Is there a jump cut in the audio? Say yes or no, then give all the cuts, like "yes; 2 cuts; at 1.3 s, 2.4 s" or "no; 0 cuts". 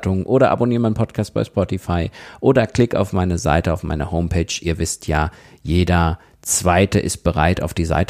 no; 0 cuts